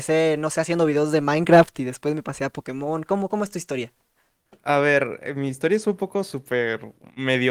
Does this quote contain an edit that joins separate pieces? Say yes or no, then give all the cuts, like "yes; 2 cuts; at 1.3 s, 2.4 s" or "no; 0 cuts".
no; 0 cuts